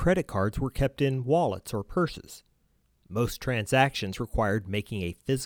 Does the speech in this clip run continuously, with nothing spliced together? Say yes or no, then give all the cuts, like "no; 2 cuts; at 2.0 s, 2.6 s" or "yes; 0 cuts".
yes; 0 cuts